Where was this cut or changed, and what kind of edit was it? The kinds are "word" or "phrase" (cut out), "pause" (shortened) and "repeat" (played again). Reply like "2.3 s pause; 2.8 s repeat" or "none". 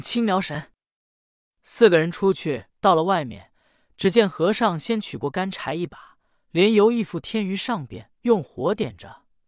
2.7 s pause; 8.1 s pause